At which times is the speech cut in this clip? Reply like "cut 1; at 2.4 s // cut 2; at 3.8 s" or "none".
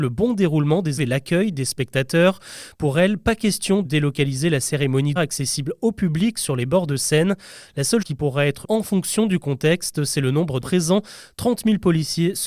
cut 1; at 1.0 s // cut 2; at 3.8 s // cut 3; at 5.2 s // cut 4; at 8.0 s // cut 5; at 8.6 s // cut 6; at 10.6 s